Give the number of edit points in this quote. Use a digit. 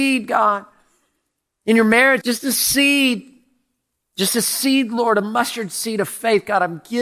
1